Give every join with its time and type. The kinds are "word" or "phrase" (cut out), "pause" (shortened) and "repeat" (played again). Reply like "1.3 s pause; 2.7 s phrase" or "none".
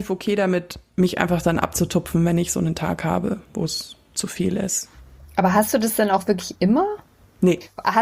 3.4 s pause